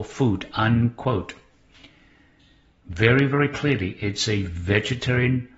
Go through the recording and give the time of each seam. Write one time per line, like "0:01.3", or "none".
none